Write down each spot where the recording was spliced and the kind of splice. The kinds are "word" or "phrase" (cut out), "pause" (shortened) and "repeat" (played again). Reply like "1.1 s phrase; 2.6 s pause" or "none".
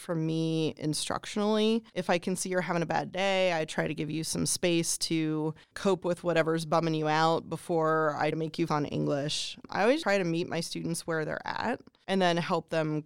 1.9 s pause; 5.6 s pause; 8.3 s word; 8.7 s word; 10.0 s word